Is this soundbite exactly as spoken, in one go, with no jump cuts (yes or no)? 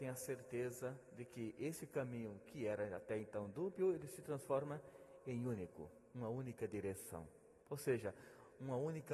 no